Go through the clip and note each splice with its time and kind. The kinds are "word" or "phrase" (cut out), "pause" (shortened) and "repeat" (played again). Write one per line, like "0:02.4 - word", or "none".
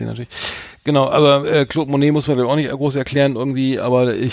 none